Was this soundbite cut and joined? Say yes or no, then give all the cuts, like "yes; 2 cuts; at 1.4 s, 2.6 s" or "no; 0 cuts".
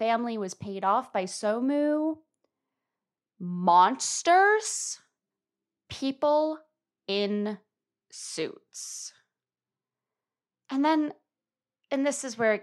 no; 0 cuts